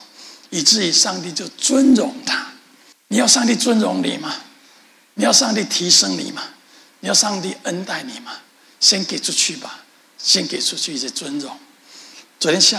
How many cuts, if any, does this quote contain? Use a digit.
1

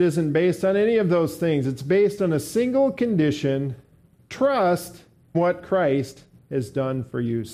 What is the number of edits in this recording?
1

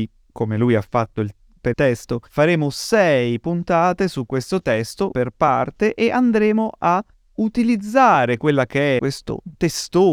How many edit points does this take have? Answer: 5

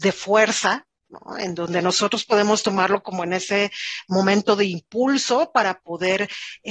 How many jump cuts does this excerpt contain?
0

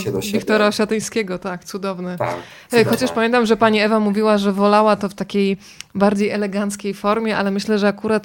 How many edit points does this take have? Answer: 0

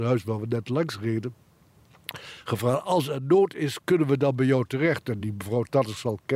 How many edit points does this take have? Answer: 0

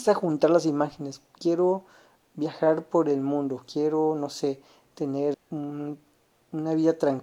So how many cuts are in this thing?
1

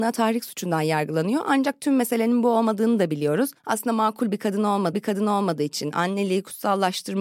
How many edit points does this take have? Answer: 2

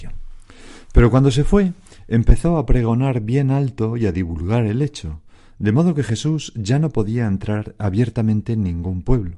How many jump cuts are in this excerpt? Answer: 0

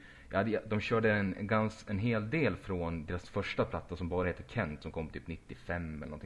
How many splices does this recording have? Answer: 0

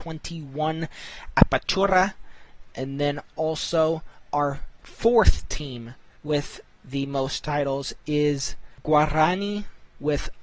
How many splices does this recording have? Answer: 0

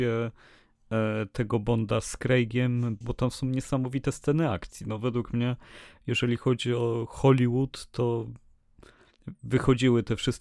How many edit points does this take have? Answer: 1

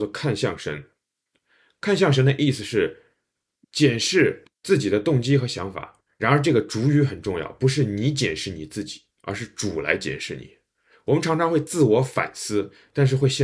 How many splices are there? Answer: 2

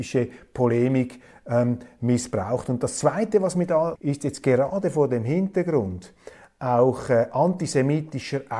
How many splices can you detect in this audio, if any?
1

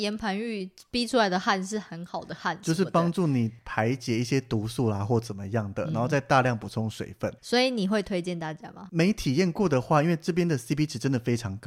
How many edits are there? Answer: 1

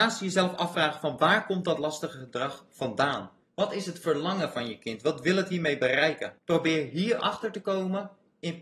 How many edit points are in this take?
2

